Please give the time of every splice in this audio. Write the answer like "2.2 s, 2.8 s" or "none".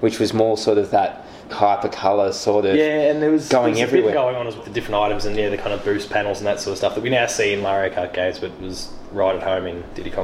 1.5 s, 4.1 s, 4.6 s, 7.6 s